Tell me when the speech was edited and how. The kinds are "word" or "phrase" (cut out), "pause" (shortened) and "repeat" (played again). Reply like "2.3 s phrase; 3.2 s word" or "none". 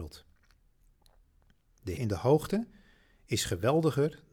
2.0 s word